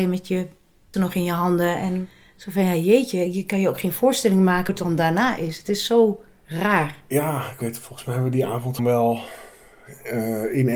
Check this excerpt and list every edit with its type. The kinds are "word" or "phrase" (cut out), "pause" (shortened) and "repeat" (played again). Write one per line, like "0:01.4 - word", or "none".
0:00.9 - word
0:04.7 - word
0:08.8 - word